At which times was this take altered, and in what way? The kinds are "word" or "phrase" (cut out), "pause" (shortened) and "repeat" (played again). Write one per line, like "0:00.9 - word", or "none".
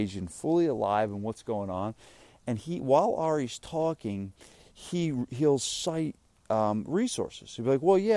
none